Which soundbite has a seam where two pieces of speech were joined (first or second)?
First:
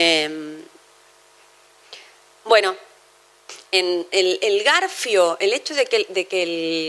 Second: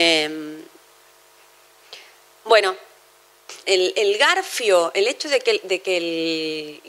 second